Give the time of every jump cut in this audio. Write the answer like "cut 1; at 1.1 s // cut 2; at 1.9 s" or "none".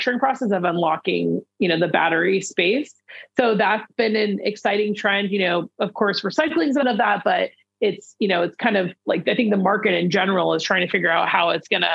cut 1; at 6.8 s // cut 2; at 9.0 s